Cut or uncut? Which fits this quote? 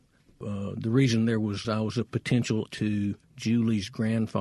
cut